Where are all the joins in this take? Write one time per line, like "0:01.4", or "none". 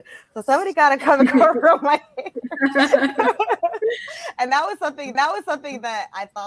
0:05.1